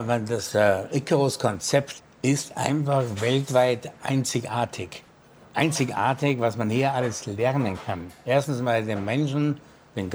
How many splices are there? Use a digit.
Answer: 0